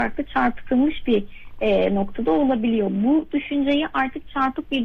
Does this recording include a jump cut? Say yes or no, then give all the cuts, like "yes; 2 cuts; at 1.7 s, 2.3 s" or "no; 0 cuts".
no; 0 cuts